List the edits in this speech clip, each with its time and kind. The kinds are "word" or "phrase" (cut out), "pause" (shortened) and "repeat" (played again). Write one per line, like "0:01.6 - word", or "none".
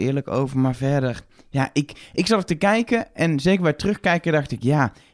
none